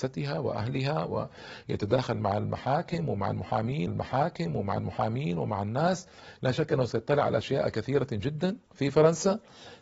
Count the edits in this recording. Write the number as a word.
two